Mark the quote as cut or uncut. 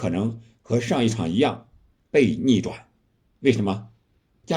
uncut